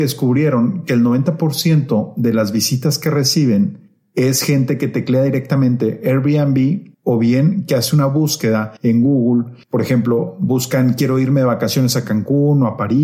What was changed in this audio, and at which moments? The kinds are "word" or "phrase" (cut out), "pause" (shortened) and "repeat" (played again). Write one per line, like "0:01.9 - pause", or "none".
0:06.9 - pause
0:08.8 - pause
0:09.6 - pause